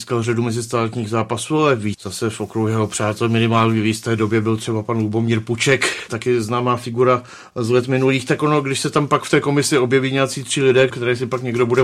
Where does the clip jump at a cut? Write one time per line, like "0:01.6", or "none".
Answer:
0:01.9
0:10.9